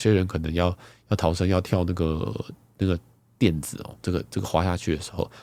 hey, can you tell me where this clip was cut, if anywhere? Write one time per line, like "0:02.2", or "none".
0:04.0